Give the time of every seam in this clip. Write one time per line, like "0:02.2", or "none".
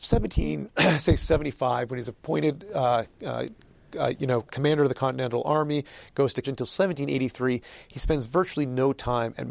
0:04.5
0:06.4